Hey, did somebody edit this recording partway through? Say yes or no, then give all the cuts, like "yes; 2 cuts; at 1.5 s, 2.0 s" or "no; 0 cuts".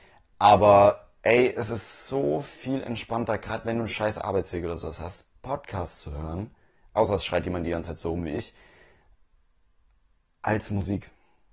no; 0 cuts